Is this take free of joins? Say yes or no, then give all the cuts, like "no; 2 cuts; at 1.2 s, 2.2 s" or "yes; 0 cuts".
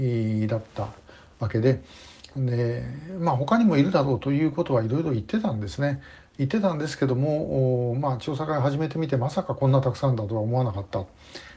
yes; 0 cuts